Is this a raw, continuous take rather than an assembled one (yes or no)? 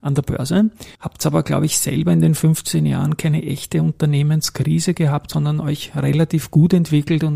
no